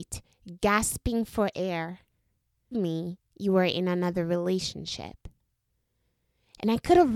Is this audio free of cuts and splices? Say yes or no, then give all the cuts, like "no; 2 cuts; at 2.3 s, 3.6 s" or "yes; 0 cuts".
no; 1 cut; at 2.7 s